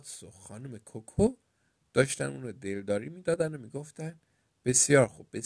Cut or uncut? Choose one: uncut